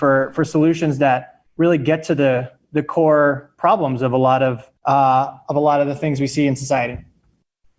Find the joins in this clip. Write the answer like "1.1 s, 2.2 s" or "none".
1.5 s, 4.8 s